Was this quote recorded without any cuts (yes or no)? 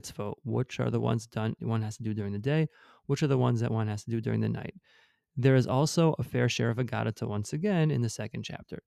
yes